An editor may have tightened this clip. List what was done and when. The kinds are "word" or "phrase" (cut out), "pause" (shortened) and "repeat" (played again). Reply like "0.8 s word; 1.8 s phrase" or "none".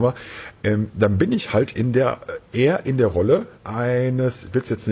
3.6 s pause